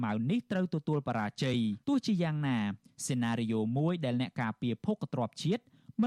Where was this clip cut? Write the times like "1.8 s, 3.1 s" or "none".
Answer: 1.8 s